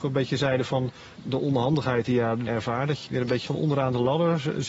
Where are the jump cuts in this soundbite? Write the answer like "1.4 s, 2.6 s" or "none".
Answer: 1.1 s, 2.5 s, 3.1 s, 3.5 s